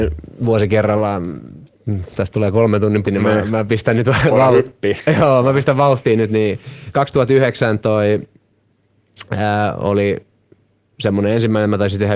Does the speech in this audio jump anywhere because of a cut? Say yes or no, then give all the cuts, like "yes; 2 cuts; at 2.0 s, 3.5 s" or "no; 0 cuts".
yes; 2 cuts; at 3.0 s, 6.9 s